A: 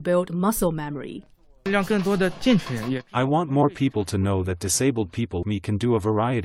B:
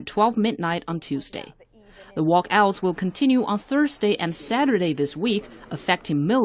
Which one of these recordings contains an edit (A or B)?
A